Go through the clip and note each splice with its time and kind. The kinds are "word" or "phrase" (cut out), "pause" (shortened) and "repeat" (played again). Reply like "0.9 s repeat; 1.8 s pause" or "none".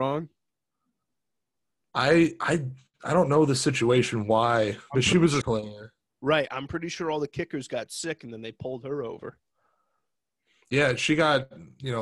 5.4 s phrase